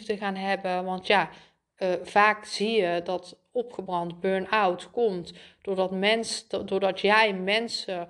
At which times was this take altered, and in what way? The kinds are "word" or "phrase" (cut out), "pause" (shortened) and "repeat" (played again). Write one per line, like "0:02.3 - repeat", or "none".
none